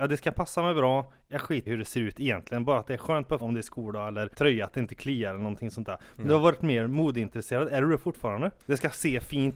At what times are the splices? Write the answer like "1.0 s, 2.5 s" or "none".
1.7 s, 3.4 s, 4.3 s, 8.6 s